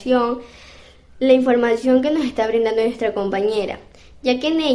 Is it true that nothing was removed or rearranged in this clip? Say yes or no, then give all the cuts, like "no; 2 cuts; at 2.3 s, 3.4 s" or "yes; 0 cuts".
yes; 0 cuts